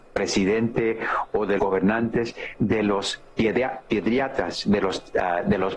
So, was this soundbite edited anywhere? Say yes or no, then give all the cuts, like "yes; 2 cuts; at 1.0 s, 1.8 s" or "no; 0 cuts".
yes; 2 cuts; at 1.6 s, 2.5 s